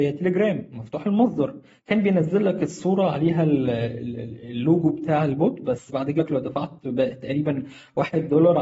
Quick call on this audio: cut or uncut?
cut